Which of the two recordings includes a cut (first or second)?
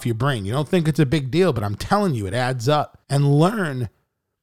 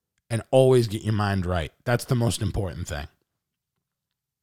first